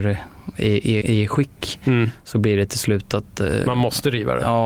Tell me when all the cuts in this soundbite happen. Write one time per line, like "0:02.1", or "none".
0:01.0